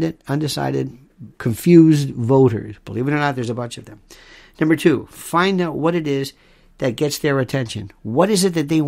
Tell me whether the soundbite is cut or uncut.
cut